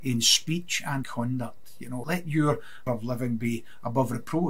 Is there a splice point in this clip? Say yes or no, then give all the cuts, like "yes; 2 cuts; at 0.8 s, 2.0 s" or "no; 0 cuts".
yes; 3 cuts; at 1.0 s, 2.0 s, 2.9 s